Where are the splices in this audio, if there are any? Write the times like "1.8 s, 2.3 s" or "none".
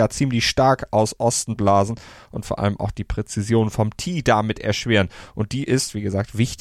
none